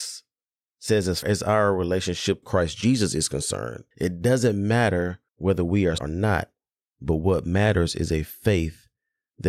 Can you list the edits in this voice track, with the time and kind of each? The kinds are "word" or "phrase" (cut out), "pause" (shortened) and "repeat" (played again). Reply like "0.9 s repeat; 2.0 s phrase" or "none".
1.2 s word; 2.4 s word; 3.9 s pause; 5.3 s pause; 6.0 s word